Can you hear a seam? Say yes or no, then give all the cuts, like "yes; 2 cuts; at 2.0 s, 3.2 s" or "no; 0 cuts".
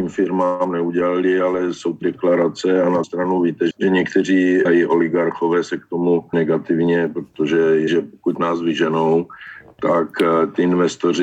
yes; 6 cuts; at 2.0 s, 3.0 s, 3.7 s, 4.7 s, 6.3 s, 7.9 s